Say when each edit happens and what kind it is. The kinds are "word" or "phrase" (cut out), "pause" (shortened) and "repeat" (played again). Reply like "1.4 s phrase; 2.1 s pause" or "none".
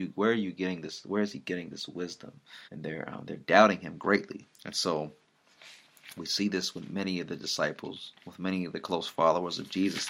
2.6 s pause; 4.5 s pause; 8.2 s pause